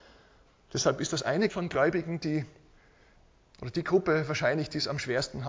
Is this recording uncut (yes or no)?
no